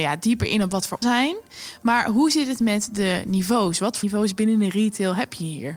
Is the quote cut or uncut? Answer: cut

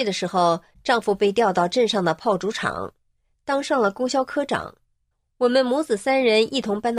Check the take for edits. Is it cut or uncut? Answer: uncut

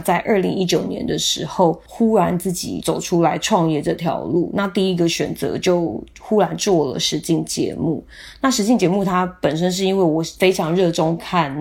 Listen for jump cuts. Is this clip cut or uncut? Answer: cut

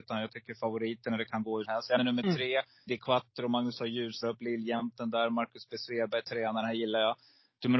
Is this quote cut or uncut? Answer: cut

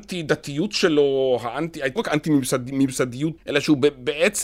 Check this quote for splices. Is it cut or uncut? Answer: cut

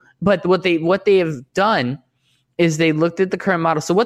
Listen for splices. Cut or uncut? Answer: uncut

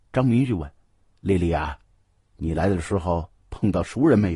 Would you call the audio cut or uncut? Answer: uncut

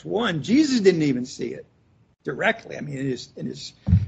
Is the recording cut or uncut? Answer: uncut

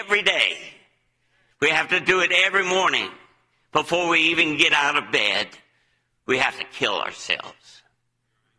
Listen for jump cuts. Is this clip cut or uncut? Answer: uncut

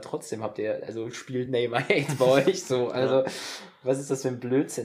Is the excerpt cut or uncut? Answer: uncut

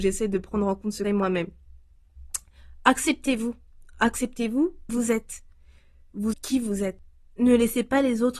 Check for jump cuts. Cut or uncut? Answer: cut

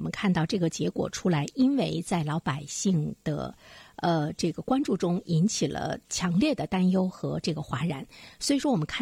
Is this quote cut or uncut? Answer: cut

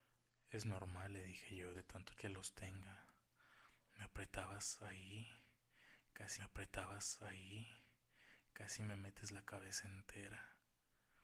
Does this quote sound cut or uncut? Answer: cut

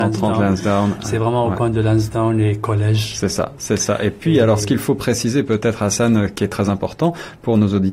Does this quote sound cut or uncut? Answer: uncut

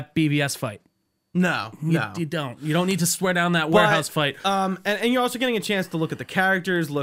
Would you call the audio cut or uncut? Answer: uncut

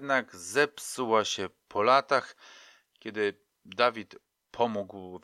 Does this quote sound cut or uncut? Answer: uncut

